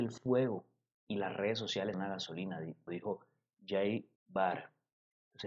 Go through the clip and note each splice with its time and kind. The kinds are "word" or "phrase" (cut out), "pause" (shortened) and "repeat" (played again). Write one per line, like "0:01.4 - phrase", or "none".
0:01.9 - word
0:02.9 - word
0:04.2 - pause

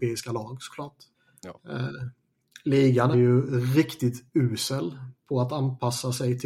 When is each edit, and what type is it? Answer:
0:01.1 - pause
0:03.1 - word

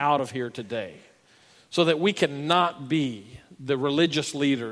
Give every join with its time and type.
none

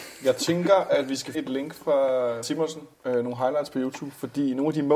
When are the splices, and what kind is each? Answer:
0:01.3 - word
0:02.4 - word
0:02.9 - pause

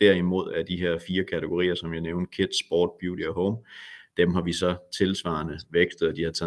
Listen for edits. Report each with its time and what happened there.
none

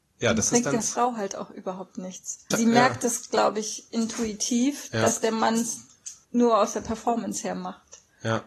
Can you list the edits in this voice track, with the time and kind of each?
0:02.5 - word
0:06.2 - pause

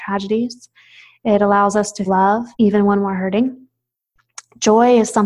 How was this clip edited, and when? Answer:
0:02.1 - word
0:02.5 - pause

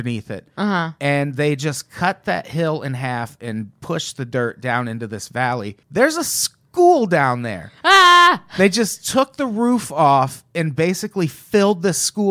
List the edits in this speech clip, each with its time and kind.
0:05.8 - pause
0:07.8 - pause

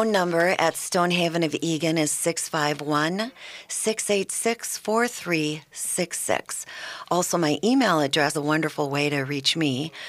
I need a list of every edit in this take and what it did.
0:08.3 - word

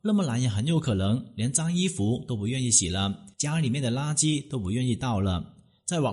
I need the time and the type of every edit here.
0:03.3 - pause

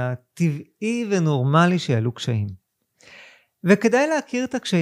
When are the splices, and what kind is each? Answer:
none

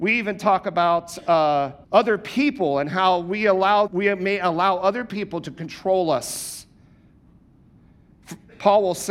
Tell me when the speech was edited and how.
0:01.8 - pause
0:03.9 - word

